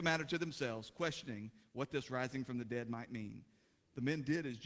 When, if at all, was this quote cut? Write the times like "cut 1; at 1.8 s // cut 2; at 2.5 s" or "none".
none